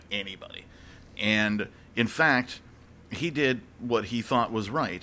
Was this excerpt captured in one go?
yes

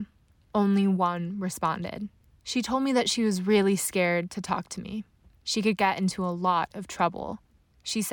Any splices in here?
no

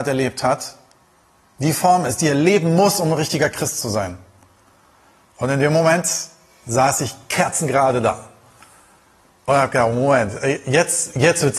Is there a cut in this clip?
no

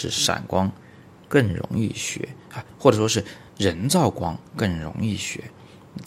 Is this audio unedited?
no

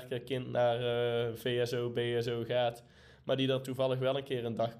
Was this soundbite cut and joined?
no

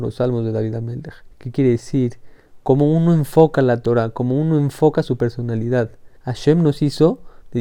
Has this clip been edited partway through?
yes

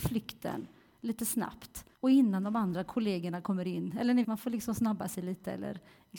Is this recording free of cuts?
no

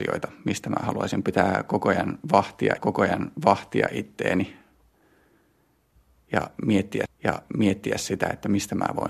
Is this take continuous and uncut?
no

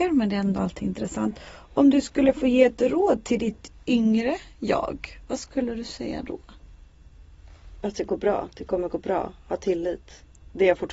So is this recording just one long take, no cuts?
yes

